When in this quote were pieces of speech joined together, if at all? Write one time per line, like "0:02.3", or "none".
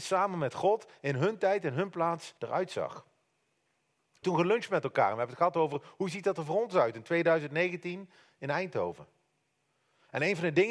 0:02.4
0:04.2